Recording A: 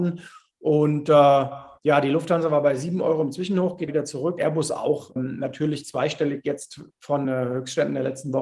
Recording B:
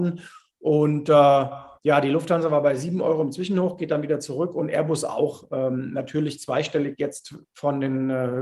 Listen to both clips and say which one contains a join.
A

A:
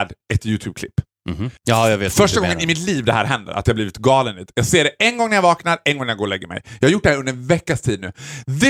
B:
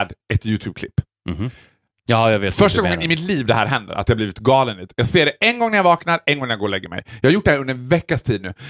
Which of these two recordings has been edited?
A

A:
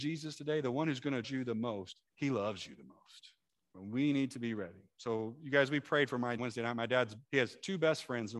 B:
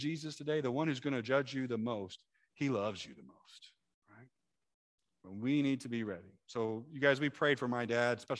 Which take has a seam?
A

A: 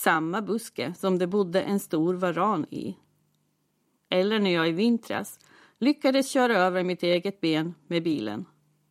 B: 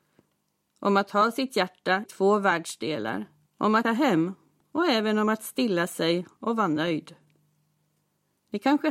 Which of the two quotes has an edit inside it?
B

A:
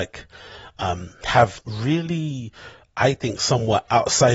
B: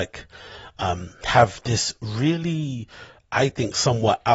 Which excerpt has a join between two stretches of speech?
A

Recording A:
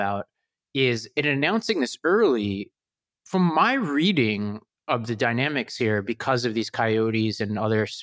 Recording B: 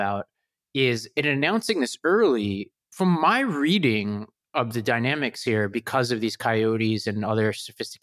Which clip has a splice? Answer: B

